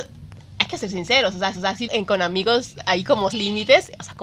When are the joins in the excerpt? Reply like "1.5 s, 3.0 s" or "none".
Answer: 1.5 s, 1.9 s, 3.3 s